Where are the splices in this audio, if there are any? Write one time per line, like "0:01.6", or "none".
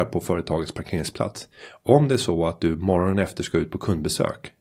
none